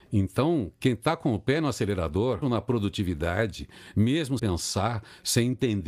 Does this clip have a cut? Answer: yes; 2 cuts; at 2.4 s, 4.4 s

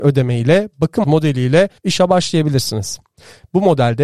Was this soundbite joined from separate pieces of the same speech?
yes; 2 cuts; at 1.0 s, 1.8 s

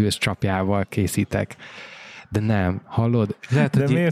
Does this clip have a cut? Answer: no; 0 cuts

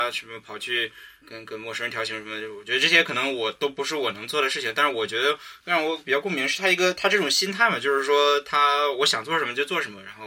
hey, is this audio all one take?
no; 1 cut; at 1.2 s

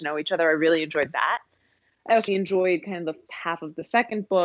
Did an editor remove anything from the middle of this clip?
yes; 2 cuts; at 2.3 s, 3.3 s

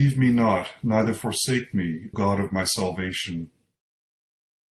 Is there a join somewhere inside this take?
yes; 1 cut; at 2.1 s

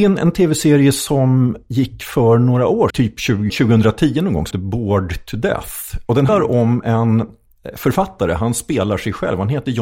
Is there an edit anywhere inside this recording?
yes; 4 cuts; at 2.9 s, 3.5 s, 4.5 s, 6.3 s

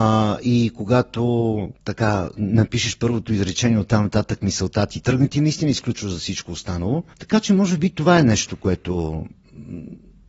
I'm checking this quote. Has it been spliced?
yes; 2 cuts; at 1.8 s, 7.1 s

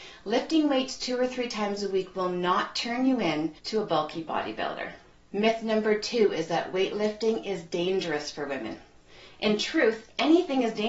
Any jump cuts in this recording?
yes; 2 cuts; at 3.6 s, 5.1 s

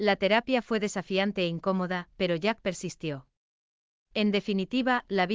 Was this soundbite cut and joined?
no; 0 cuts

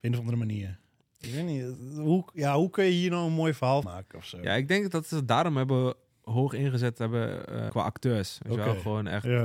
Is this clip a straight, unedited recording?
no; 2 cuts; at 3.8 s, 7.7 s

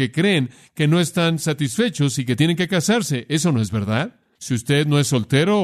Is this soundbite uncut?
yes; 0 cuts

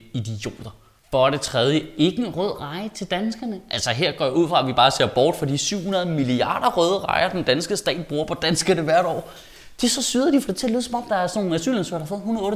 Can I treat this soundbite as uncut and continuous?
yes; 0 cuts

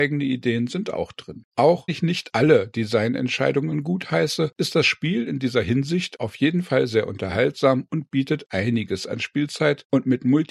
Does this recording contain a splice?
yes; 1 cut; at 1.9 s

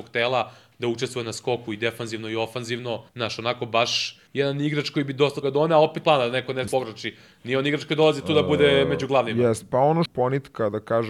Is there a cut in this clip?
yes; 6 cuts; at 3.1 s, 4.3 s, 5.4 s, 6.0 s, 6.7 s, 10.1 s

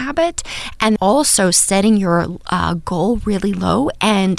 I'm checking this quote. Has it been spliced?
yes; 1 cut; at 1.0 s

